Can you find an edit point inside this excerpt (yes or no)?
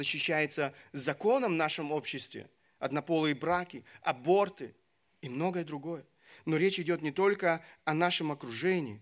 no